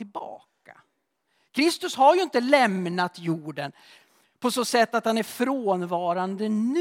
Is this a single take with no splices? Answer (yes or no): yes